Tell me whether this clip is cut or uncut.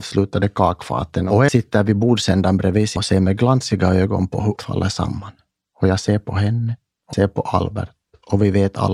cut